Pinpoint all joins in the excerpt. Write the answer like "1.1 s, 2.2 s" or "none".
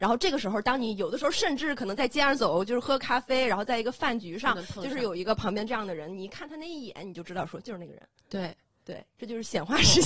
none